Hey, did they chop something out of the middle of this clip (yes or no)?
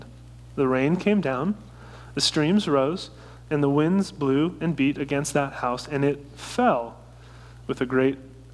no